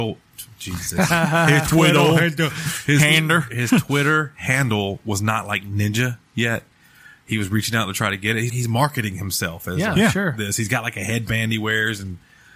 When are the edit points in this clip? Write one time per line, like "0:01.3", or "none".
0:08.5